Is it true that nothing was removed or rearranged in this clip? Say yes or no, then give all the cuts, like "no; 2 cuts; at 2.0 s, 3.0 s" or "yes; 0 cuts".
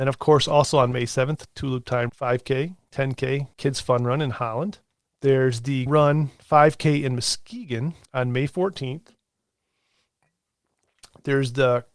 no; 5 cuts; at 2.1 s, 3.5 s, 5.0 s, 5.9 s, 8.0 s